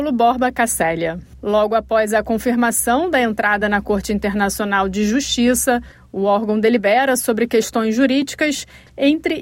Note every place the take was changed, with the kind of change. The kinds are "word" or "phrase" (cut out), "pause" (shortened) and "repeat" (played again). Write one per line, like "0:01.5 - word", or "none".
none